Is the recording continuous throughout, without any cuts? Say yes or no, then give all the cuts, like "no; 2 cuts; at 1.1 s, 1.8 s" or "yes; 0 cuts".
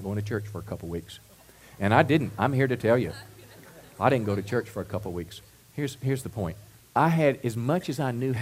no; 2 cuts; at 5.5 s, 6.8 s